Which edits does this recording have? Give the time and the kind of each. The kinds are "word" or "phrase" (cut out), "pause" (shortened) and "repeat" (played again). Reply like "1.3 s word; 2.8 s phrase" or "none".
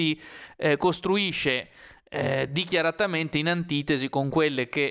none